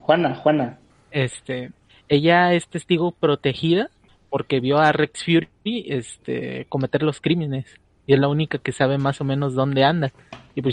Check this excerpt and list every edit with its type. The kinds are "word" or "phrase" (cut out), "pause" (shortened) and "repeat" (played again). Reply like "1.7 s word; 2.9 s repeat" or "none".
none